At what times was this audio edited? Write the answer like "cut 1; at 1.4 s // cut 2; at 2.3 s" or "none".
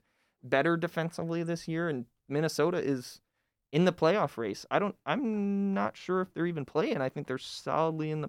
none